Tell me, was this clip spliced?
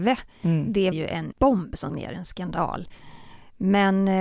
yes; 3 cuts; at 0.9 s, 1.3 s, 1.9 s

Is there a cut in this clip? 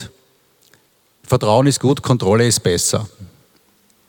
no; 0 cuts

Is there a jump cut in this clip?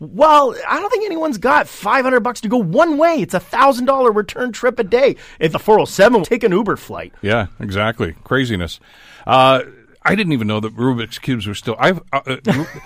yes; 2 cuts; at 5.5 s, 6.2 s

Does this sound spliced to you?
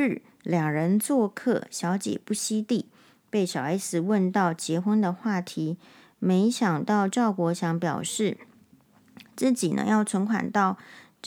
no; 0 cuts

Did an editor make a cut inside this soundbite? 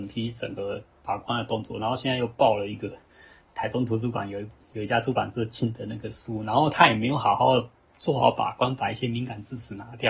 no; 0 cuts

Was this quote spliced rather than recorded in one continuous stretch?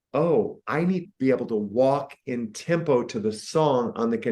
yes; 1 cut; at 1.0 s

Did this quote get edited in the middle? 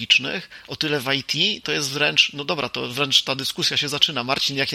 no; 0 cuts

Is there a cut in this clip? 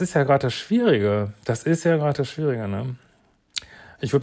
no; 0 cuts

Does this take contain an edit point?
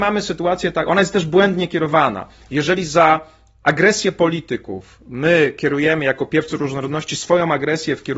no; 0 cuts

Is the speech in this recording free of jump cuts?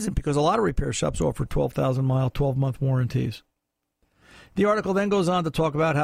yes; 0 cuts

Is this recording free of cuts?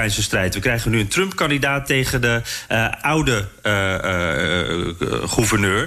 yes; 0 cuts

